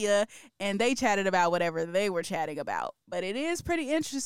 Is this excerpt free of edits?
yes; 0 cuts

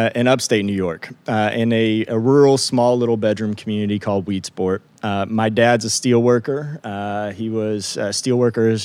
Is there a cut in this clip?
no; 0 cuts

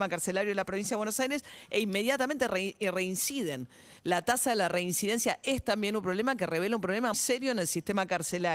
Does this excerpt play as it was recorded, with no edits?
no; 1 cut; at 7.1 s

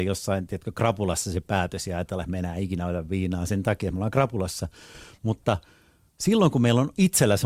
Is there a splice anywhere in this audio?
no; 0 cuts

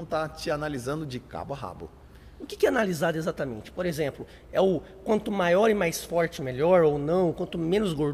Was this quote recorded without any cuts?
yes; 0 cuts

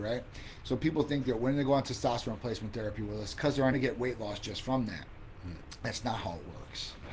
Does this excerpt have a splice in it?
yes; 1 cut; at 3.7 s

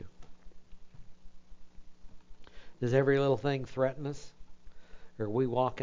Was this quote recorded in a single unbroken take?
yes; 0 cuts

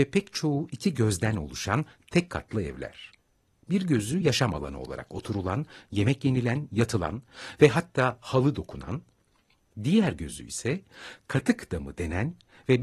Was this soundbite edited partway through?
no; 0 cuts

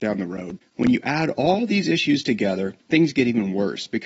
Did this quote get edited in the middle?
yes; 1 cut; at 2.8 s

